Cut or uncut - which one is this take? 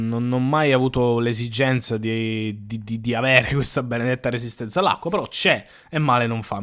uncut